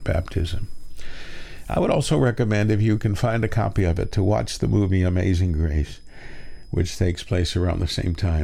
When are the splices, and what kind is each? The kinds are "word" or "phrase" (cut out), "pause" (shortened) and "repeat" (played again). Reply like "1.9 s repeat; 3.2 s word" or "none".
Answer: none

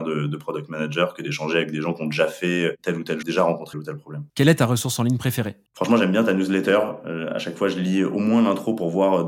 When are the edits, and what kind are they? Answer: 3.2 s word; 3.7 s word; 4.3 s pause; 5.7 s pause

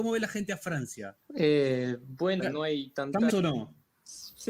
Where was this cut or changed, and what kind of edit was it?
2.4 s word; 3.3 s word

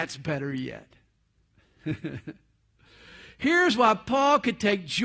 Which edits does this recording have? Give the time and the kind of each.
none

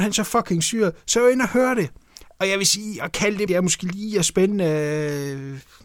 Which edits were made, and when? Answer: 3.5 s word

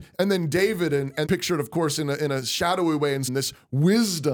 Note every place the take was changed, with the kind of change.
1.3 s word; 3.3 s word

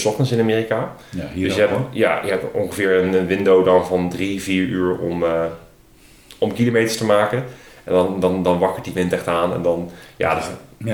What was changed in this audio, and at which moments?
none

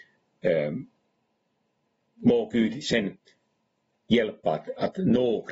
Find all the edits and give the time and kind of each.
none

